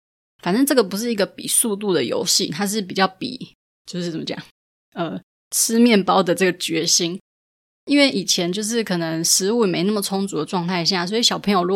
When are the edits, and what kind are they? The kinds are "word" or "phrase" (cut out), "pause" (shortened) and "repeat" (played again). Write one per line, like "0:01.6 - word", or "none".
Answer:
none